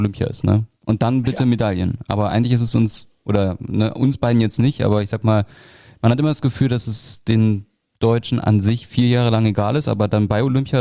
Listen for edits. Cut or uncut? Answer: uncut